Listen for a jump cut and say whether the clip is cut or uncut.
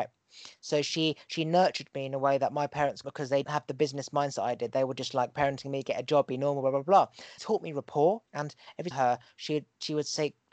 cut